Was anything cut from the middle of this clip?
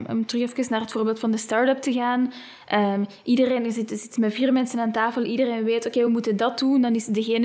no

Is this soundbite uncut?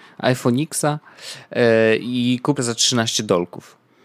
no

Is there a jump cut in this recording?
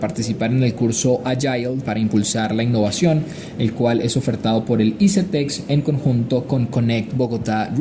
no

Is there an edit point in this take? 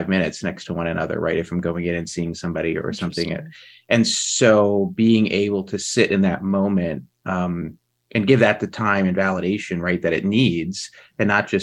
no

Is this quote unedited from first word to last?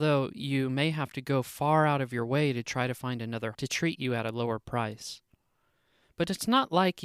no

